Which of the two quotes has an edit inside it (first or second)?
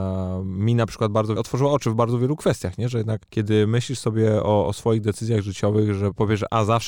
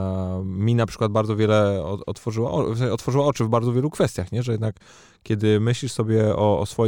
first